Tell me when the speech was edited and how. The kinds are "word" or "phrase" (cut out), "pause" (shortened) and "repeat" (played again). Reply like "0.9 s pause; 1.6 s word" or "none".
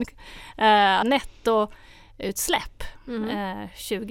1.0 s word